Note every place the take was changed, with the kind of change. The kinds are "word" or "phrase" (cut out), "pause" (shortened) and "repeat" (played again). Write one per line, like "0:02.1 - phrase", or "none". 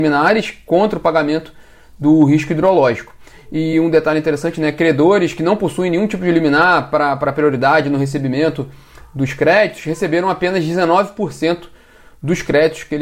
none